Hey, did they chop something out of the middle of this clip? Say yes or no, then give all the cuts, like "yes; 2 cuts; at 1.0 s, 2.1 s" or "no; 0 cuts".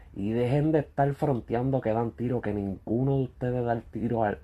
no; 0 cuts